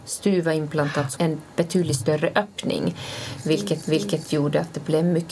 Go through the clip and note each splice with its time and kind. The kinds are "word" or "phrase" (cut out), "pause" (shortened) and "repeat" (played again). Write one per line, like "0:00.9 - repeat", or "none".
0:01.2 - word
0:03.8 - repeat

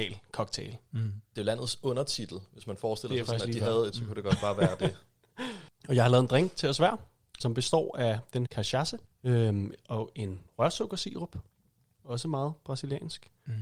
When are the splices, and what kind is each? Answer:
0:03.9 - word
0:07.4 - word
0:08.4 - word

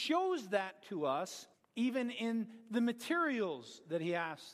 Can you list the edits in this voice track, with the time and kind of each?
0:01.5 - pause

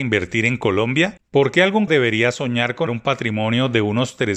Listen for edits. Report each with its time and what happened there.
0:01.9 - word
0:02.9 - word

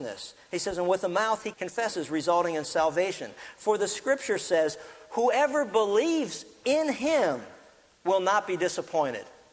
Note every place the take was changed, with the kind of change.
0:01.5 - word

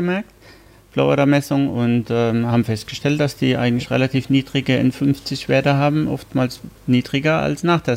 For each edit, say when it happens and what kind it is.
0:06.8 - pause

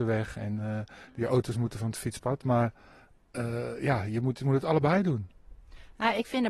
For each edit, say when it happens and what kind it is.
none

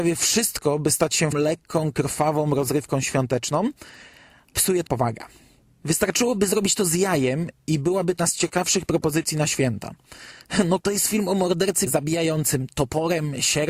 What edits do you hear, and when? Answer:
0:01.3 - word
0:04.5 - word
0:04.9 - word
0:08.2 - word
0:10.8 - word
0:11.9 - word

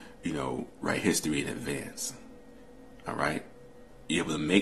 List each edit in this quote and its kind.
none

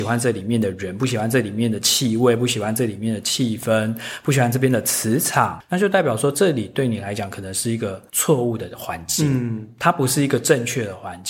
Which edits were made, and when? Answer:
0:08.1 - pause

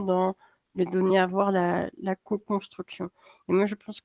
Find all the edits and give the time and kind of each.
none

